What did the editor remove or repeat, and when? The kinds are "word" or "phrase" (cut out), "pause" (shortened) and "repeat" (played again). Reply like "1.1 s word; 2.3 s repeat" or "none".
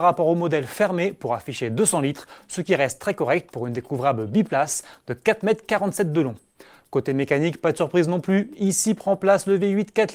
none